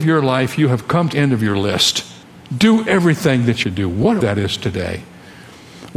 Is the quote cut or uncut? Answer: cut